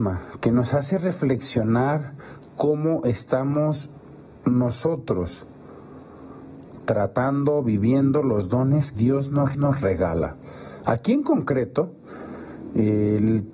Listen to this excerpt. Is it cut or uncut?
cut